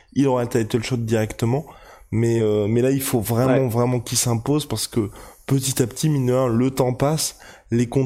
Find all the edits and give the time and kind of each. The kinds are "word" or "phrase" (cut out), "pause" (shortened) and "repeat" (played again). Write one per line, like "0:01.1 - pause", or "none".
none